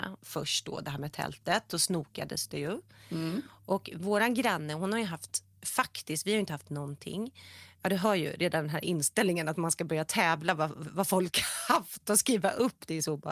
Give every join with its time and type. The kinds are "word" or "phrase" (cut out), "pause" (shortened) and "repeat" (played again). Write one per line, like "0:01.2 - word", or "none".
none